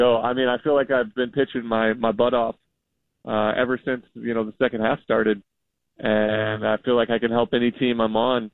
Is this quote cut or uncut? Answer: uncut